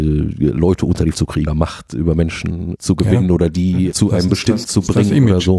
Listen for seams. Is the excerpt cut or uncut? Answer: cut